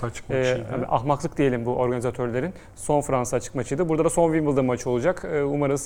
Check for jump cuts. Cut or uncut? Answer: uncut